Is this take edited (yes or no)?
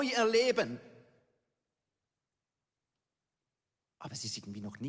no